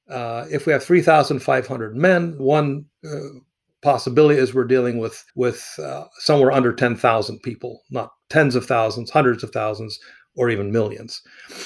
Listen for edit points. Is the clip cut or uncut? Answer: cut